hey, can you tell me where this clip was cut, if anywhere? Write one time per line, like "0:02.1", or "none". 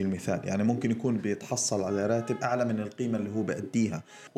none